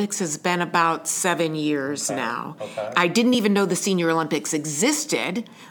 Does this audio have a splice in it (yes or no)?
no